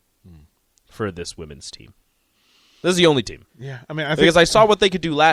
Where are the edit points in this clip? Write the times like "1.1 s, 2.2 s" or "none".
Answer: 3.5 s